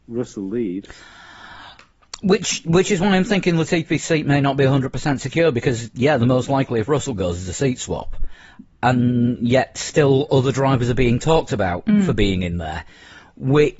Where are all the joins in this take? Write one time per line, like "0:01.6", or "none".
none